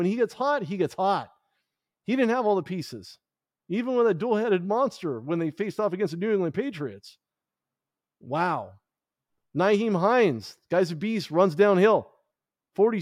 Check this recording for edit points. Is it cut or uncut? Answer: uncut